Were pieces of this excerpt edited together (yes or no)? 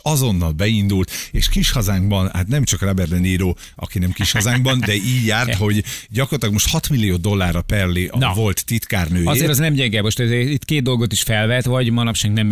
no